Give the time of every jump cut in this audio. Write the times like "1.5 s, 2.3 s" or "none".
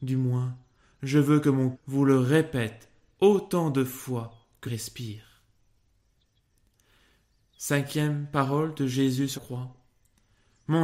1.7 s, 4.7 s, 9.4 s